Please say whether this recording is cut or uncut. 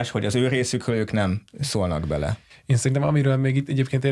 uncut